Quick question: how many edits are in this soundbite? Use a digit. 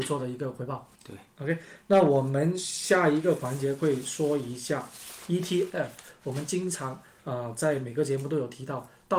1